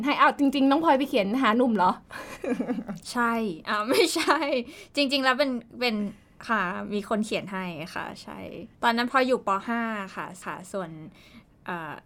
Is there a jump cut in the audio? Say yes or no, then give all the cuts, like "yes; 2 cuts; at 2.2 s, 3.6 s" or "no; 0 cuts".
yes; 3 cuts; at 3.0 s, 8.7 s, 10.4 s